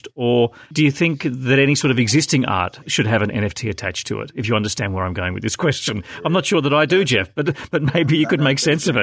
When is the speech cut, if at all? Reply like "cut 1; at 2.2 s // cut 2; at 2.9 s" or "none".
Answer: none